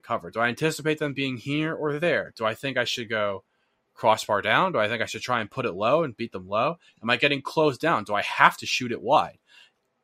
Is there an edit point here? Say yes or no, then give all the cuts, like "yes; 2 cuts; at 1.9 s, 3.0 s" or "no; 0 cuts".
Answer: no; 0 cuts